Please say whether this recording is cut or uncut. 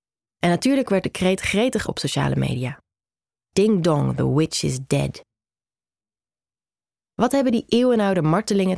cut